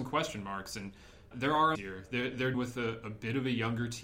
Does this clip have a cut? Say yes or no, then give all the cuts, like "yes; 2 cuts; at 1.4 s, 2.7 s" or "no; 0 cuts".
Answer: yes; 3 cuts; at 1.3 s, 1.7 s, 2.5 s